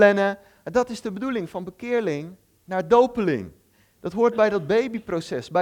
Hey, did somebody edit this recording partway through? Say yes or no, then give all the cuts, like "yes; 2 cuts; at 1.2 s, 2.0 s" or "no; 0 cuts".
no; 0 cuts